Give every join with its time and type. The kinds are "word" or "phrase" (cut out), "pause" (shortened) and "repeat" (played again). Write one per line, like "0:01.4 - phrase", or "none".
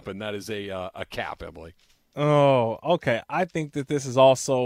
none